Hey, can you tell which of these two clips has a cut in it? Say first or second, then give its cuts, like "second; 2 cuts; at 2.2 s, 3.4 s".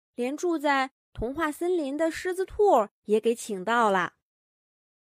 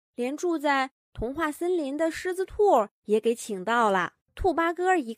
second; 1 cut; at 4.2 s